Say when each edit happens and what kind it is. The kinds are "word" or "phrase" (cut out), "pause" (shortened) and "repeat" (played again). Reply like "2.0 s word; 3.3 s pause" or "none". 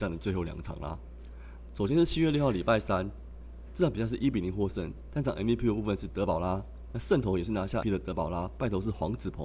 7.8 s word